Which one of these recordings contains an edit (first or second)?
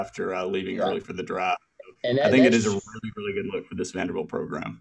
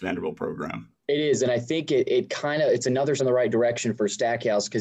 second